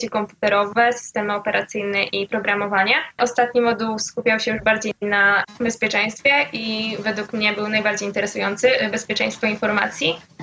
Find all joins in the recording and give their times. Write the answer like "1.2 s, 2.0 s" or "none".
none